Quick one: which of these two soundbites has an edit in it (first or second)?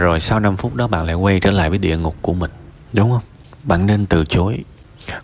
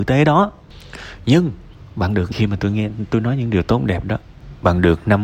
second